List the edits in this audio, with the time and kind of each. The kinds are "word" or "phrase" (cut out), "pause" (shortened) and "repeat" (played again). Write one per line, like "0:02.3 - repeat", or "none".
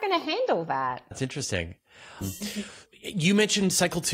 0:01.1 - word
0:02.2 - word
0:02.9 - word